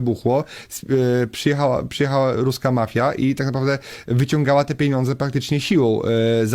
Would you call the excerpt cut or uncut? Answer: uncut